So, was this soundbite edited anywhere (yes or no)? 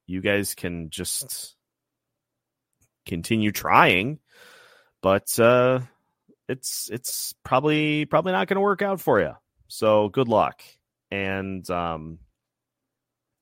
no